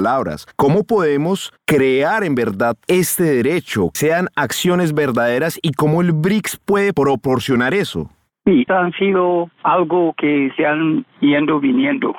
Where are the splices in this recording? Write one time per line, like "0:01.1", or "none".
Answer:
0:03.9
0:08.7